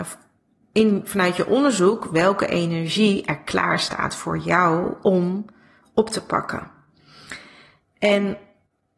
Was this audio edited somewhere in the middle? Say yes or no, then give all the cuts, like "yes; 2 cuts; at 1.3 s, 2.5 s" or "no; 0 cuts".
no; 0 cuts